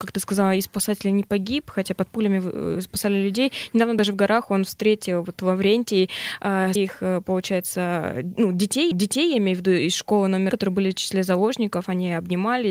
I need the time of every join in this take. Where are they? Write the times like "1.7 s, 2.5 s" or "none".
6.8 s, 8.9 s, 10.5 s